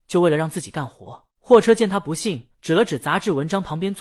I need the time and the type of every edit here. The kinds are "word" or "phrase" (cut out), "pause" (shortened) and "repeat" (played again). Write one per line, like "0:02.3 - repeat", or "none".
0:01.3 - pause
0:02.5 - pause